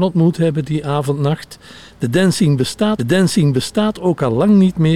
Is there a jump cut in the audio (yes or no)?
yes